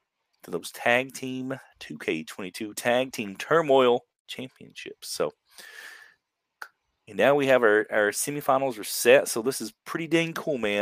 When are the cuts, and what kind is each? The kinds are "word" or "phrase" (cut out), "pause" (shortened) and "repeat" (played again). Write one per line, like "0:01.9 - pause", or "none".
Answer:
none